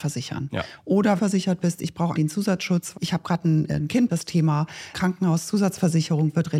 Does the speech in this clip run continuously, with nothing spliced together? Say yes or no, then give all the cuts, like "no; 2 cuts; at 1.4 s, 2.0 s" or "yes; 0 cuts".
no; 5 cuts; at 1.2 s, 2.1 s, 2.9 s, 4.1 s, 4.9 s